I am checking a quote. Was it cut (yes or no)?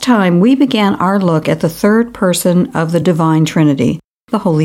no